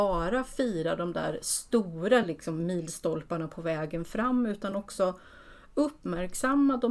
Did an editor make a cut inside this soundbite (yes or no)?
no